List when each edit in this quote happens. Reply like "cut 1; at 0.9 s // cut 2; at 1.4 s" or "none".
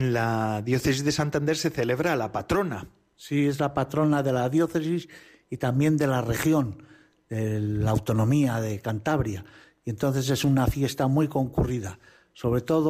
none